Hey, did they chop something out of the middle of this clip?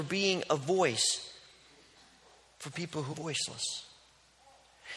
yes; 1 cut; at 3.1 s

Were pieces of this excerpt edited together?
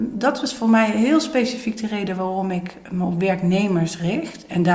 no; 0 cuts

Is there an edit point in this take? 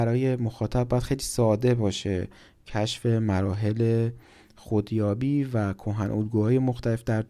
no; 0 cuts

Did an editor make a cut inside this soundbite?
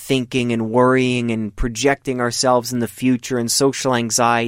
no; 0 cuts

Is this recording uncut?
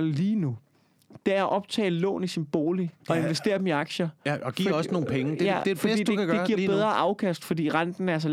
no; 1 cut; at 3.0 s

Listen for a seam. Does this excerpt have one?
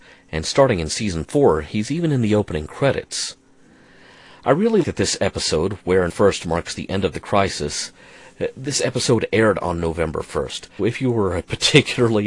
yes; 3 cuts; at 4.8 s, 6.1 s, 10.8 s

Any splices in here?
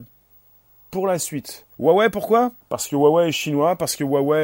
yes; 2 cuts; at 1.7 s, 2.6 s

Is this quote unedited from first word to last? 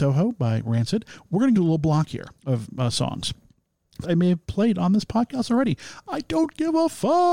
no; 3 cuts; at 1.5 s, 2.4 s, 4.0 s

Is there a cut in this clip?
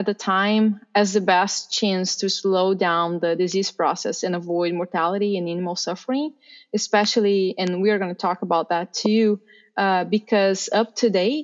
no; 0 cuts

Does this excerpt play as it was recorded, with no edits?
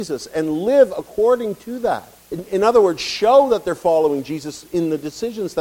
no; 1 cut; at 2.2 s

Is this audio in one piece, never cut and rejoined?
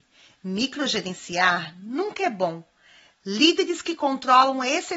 yes; 0 cuts

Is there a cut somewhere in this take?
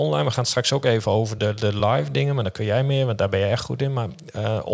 no; 0 cuts

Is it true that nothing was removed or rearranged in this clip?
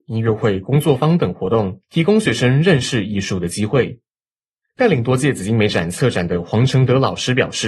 no; 1 cut; at 1.8 s

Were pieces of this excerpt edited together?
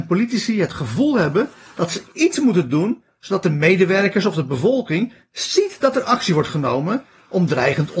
no; 0 cuts

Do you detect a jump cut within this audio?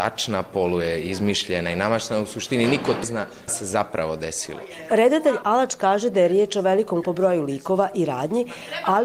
yes; 3 cuts; at 3.0 s, 3.5 s, 7.0 s

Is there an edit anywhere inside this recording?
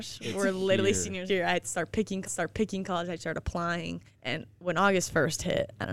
yes; 3 cuts; at 1.3 s, 2.2 s, 4.1 s

